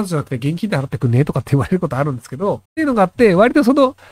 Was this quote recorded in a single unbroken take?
no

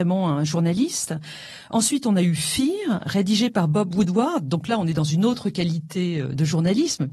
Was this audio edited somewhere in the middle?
no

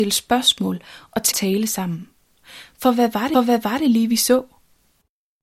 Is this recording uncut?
no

